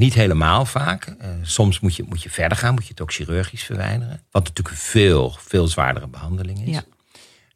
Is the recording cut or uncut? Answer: cut